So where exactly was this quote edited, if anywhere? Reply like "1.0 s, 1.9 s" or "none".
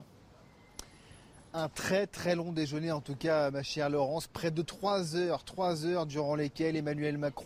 none